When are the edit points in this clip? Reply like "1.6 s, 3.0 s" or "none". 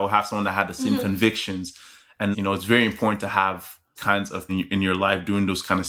2.3 s, 4.0 s, 4.5 s